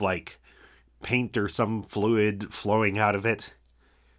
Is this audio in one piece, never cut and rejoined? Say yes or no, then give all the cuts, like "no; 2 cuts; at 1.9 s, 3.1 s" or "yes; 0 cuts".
yes; 0 cuts